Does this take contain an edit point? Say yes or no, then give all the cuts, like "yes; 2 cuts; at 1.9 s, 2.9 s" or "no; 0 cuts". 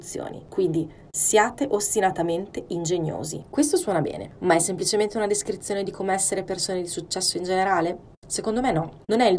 no; 0 cuts